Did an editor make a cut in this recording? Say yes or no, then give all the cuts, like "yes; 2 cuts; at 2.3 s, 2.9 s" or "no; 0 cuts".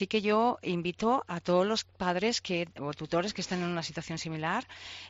no; 0 cuts